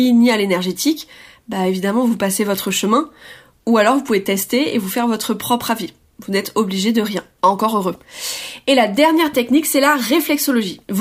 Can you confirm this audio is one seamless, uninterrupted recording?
yes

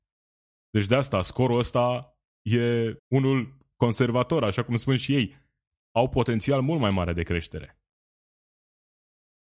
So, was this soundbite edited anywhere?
yes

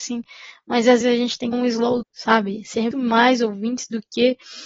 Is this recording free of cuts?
no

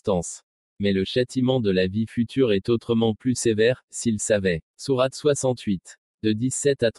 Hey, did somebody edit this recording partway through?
yes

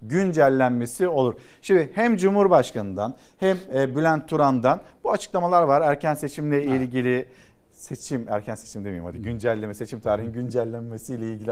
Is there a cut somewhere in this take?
no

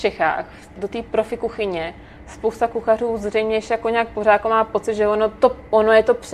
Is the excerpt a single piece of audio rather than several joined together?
yes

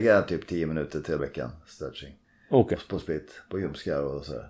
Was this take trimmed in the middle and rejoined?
yes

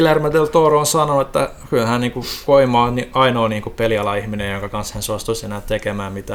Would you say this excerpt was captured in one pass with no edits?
yes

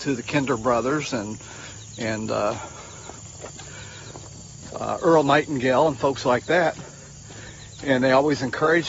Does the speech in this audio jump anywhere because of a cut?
no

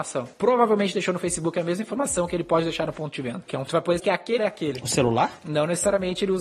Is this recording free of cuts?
no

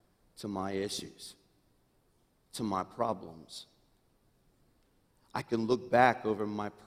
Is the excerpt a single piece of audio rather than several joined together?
yes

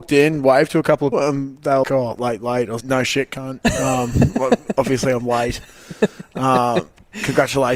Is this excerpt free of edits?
no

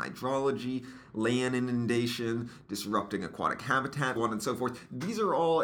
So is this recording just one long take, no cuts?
no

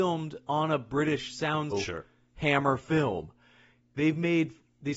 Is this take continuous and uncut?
no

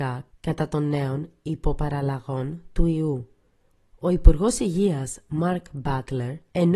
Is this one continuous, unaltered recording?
yes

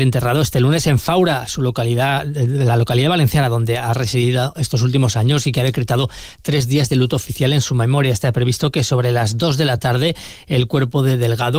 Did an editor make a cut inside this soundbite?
no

